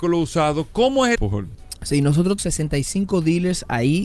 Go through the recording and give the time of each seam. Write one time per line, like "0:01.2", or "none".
0:01.2
0:02.4